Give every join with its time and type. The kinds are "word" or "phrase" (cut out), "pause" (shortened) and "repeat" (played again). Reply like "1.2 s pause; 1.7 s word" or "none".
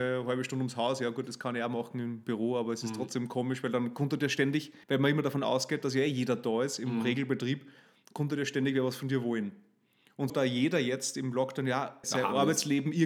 4.8 s pause; 10.3 s word; 12.0 s word